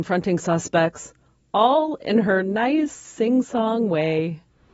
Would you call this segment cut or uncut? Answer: uncut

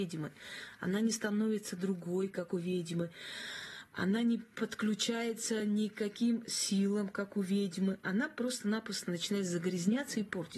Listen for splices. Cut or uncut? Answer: uncut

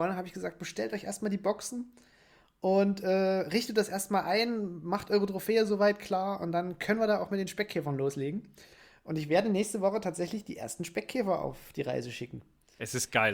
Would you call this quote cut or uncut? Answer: uncut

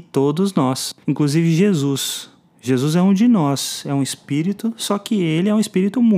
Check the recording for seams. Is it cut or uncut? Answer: cut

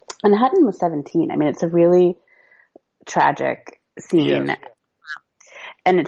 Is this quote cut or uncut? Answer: uncut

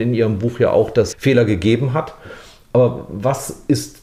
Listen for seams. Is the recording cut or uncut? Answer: cut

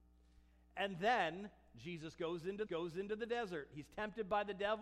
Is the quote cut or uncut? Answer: cut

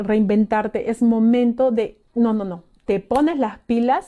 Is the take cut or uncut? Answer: cut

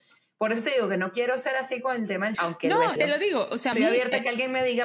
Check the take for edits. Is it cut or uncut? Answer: cut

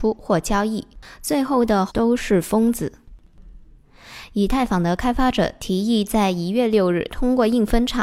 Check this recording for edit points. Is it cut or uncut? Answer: cut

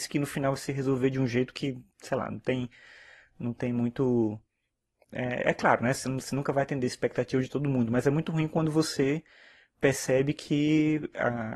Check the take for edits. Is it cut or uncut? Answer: uncut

